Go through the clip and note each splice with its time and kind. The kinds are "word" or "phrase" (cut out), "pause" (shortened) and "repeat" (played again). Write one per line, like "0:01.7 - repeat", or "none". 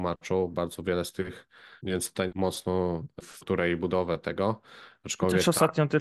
0:01.8 - word
0:02.3 - phrase
0:03.2 - word